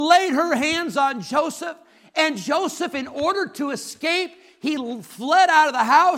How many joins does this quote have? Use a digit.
0